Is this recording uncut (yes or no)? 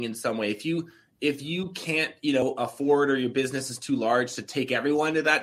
yes